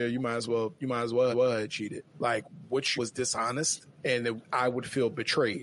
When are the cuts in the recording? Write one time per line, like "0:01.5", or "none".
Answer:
0:01.3
0:02.1
0:03.0
0:03.9
0:04.4